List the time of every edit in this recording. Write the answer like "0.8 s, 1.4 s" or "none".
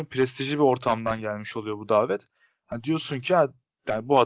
none